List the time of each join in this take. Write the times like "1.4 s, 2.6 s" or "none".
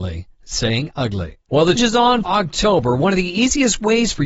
1.4 s, 1.8 s, 2.2 s